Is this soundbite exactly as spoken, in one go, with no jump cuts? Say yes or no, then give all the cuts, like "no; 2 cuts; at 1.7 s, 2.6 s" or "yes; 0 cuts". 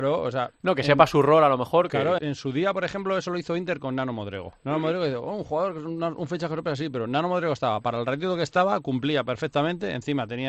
no; 2 cuts; at 2.2 s, 4.6 s